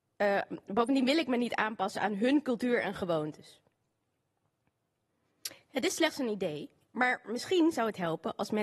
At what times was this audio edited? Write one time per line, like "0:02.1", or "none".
none